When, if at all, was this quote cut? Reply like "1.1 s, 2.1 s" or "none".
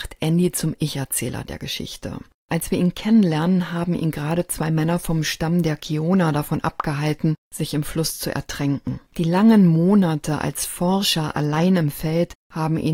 9.1 s